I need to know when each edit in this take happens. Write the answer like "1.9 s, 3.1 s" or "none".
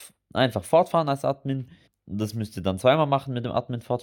1.9 s